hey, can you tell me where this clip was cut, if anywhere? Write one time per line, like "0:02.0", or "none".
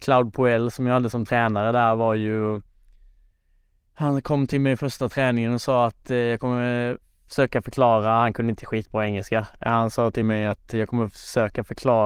none